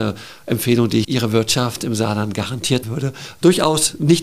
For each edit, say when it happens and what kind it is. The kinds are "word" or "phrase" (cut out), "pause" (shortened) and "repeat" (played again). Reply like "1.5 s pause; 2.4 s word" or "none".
1.0 s word; 2.8 s word